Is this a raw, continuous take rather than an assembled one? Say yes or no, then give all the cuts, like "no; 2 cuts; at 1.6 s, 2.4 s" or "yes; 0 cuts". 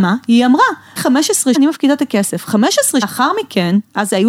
no; 3 cuts; at 1.0 s, 1.5 s, 3.0 s